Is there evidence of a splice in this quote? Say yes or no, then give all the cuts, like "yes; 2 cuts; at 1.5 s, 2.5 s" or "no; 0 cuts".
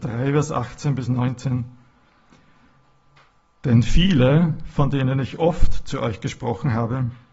no; 0 cuts